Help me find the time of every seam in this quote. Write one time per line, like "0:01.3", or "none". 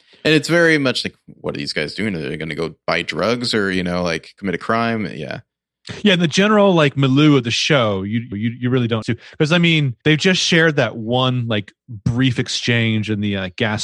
0:08.3
0:09.0
0:10.0

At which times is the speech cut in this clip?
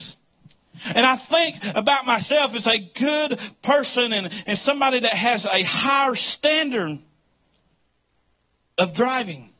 none

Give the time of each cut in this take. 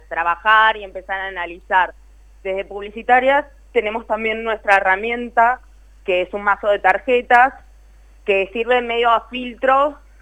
none

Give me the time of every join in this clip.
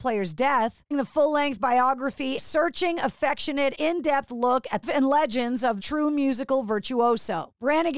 0:00.9
0:02.4
0:03.7
0:04.8
0:05.8

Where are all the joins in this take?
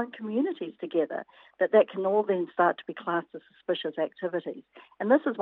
none

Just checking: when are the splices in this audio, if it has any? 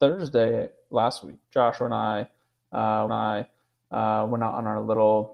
0:01.4
0:03.1

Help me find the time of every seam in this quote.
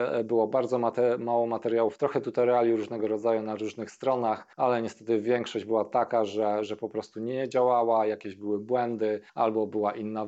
0:04.5
0:09.3

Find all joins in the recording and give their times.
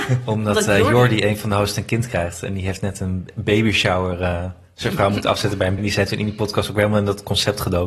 0:05.8

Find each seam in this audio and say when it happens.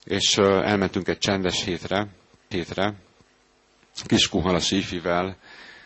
0:02.5

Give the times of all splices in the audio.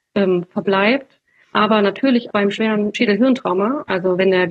0:01.5
0:02.3
0:02.9

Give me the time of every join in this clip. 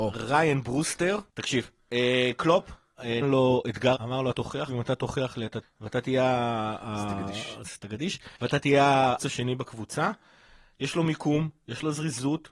0:01.3
0:03.2
0:03.9
0:04.3
0:04.7
0:05.6
0:08.4
0:09.2

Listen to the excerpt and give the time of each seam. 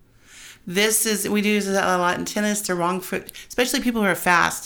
none

